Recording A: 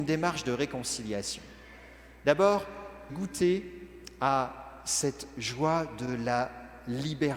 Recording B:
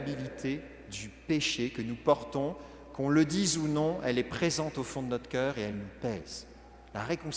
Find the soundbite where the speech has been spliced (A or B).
A